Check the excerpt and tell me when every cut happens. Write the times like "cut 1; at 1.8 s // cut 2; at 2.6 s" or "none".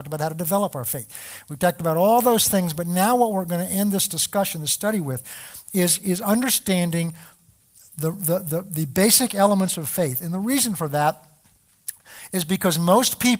none